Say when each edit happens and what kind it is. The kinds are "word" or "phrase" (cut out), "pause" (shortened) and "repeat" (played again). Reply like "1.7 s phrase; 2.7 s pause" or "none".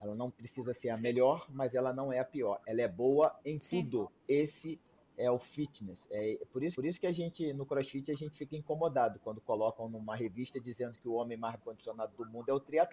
4.2 s pause; 6.8 s repeat; 11.6 s word

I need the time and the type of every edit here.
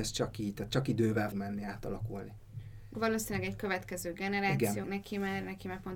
1.3 s word; 2.9 s word; 4.8 s word

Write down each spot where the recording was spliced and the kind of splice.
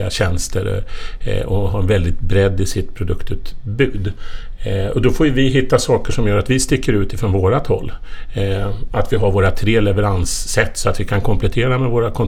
none

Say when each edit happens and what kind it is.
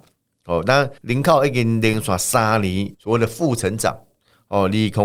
1.0 s pause; 2.9 s word

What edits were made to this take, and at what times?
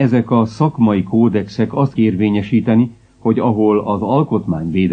2.0 s word

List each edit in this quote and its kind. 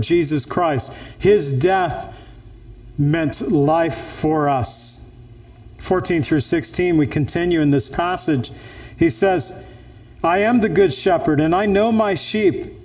none

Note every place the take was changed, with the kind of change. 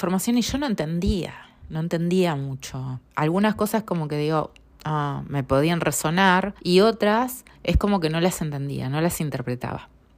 3.1 s pause; 4.7 s pause; 6.6 s pause; 7.5 s pause

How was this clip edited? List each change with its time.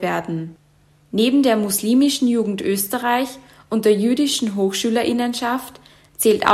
none

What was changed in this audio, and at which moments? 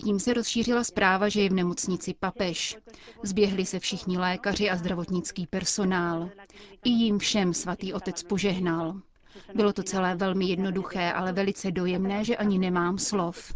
none

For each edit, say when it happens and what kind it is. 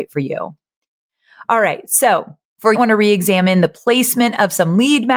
2.7 s phrase

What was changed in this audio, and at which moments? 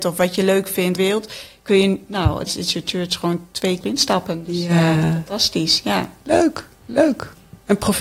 1.0 s phrase; 2.5 s word; 3.8 s phrase

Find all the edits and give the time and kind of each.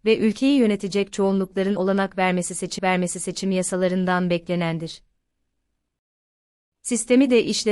1.8 s word; 2.8 s repeat

